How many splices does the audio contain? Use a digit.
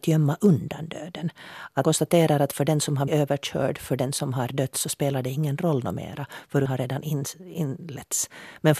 3